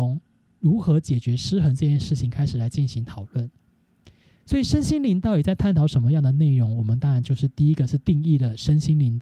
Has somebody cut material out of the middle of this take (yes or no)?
no